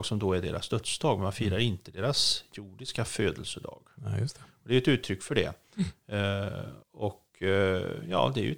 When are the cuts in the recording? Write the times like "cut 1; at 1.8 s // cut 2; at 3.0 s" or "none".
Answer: cut 1; at 6.8 s